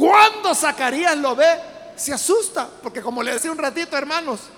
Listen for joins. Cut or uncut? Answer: cut